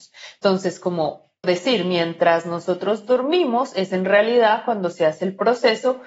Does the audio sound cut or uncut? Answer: cut